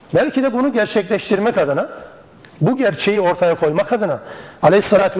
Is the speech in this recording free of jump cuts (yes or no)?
yes